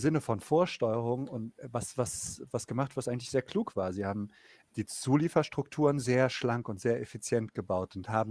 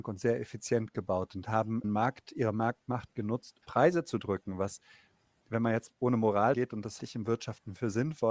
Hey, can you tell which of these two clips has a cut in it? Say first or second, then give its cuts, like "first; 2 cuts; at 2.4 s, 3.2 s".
second; 4 cuts; at 1.8 s, 3.6 s, 6.5 s, 7.0 s